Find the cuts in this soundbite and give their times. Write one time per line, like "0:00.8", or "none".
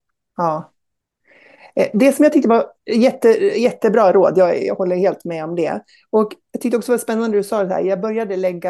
0:06.4